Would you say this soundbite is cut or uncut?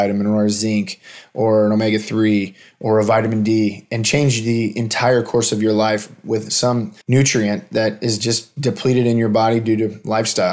cut